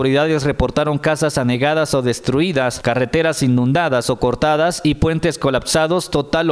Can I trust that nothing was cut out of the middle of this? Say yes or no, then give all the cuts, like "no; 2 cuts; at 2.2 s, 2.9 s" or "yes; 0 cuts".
yes; 0 cuts